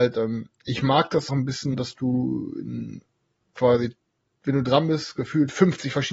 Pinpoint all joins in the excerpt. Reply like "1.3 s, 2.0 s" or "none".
1.3 s, 1.7 s, 3.5 s